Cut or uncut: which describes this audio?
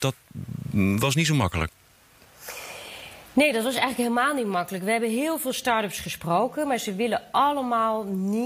uncut